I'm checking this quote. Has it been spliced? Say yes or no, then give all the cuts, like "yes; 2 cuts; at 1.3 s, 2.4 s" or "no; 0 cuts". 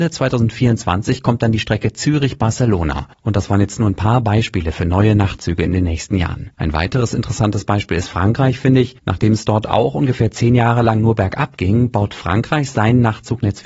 yes; 3 cuts; at 3.1 s, 6.5 s, 9.0 s